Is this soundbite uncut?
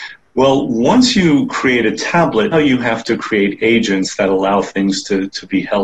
no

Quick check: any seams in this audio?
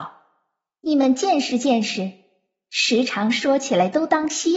no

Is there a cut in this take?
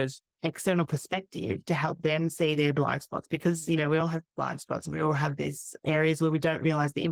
no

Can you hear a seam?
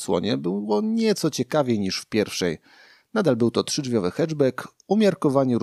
no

